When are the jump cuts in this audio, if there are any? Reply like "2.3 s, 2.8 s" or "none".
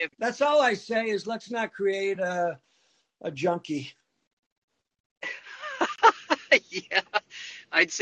none